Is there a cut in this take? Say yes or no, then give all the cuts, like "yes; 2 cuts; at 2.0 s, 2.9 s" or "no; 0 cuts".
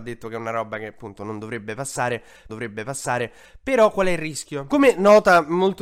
yes; 1 cut; at 2.5 s